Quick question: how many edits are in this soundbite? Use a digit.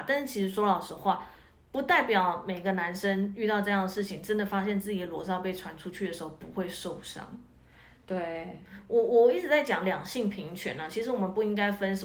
0